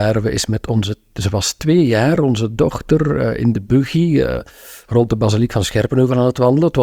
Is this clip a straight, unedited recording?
yes; 0 cuts

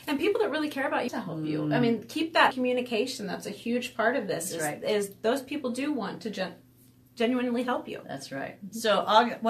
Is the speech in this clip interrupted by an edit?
yes; 2 cuts; at 1.1 s, 2.5 s

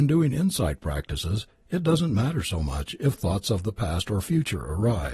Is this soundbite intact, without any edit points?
yes; 0 cuts

